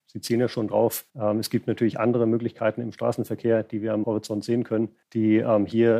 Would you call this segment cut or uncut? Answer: cut